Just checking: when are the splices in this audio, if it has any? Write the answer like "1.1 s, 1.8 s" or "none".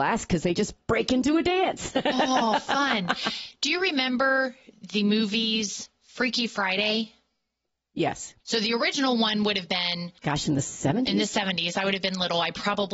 5.9 s, 8.4 s, 10.2 s